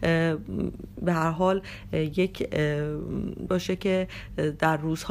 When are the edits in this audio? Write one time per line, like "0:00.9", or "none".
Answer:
0:03.5